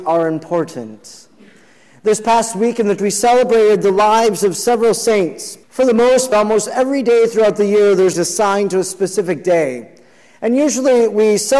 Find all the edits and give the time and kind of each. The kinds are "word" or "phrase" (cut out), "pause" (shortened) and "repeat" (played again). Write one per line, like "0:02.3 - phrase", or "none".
0:03.0 - word
0:05.6 - pause
0:06.3 - word
0:08.1 - phrase